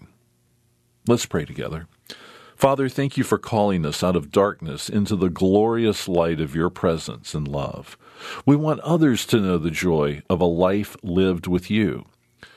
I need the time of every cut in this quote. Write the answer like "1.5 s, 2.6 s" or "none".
none